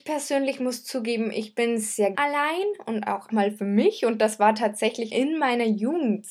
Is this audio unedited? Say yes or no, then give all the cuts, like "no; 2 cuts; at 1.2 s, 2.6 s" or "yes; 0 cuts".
no; 3 cuts; at 2.1 s, 3.3 s, 5.1 s